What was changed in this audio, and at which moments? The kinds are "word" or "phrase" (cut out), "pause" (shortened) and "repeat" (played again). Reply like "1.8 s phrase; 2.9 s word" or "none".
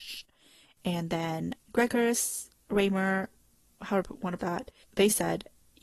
1.6 s word; 4.0 s word; 4.4 s word; 4.8 s word

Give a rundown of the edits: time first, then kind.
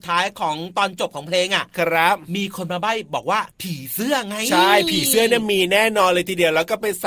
3.5 s pause

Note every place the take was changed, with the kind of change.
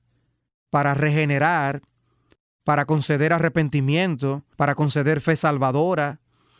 4.5 s pause

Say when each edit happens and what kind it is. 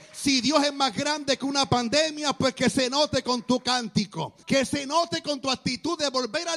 4.4 s pause

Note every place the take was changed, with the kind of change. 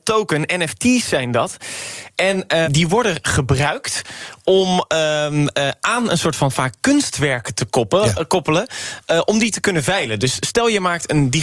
2.6 s word

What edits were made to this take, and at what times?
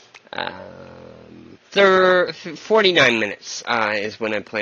1.6 s pause

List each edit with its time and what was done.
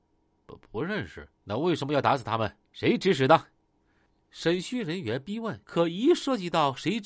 1.3 s pause; 2.6 s pause; 5.6 s pause

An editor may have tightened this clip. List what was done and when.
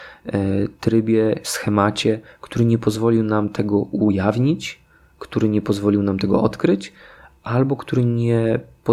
none

